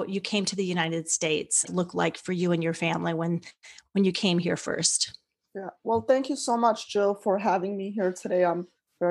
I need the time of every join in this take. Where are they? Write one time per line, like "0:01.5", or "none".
0:01.7